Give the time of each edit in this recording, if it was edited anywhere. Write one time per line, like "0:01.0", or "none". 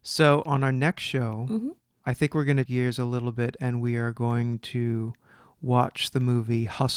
0:02.7